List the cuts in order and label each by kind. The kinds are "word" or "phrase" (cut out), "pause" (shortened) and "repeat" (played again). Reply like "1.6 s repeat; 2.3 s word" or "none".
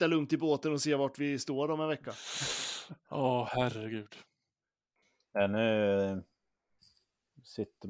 none